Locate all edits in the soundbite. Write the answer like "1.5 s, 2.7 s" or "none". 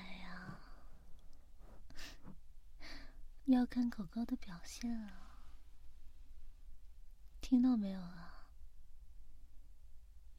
3.4 s